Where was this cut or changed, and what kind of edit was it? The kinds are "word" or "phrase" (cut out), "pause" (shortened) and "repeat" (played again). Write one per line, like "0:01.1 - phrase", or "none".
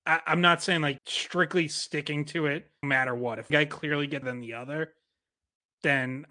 0:01.0 - word
0:02.8 - word
0:03.5 - word
0:04.2 - word